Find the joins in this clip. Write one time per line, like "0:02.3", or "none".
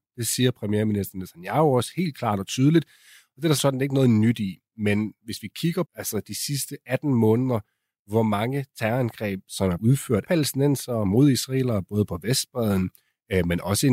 0:03.6
0:05.8
0:09.8
0:10.2